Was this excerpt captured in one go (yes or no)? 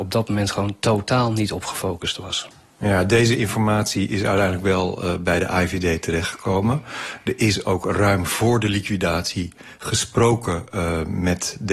yes